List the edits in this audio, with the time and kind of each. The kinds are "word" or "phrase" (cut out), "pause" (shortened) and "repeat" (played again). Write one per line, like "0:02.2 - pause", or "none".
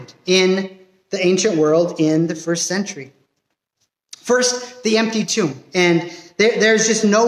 none